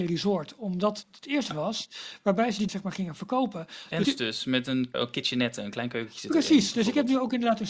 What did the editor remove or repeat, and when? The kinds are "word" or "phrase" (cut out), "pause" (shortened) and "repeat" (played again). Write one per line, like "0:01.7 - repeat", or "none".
0:01.0 - word
0:01.5 - word
0:02.7 - word
0:04.0 - word
0:04.9 - word